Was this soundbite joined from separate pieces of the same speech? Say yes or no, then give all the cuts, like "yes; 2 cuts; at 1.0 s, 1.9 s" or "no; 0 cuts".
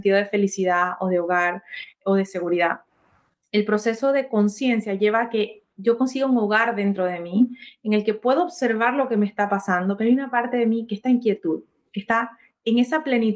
no; 0 cuts